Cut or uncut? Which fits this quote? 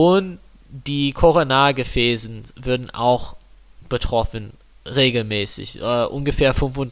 uncut